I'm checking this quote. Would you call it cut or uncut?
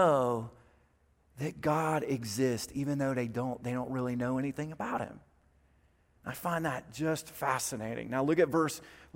uncut